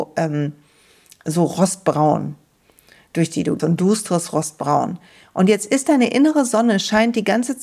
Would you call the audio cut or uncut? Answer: cut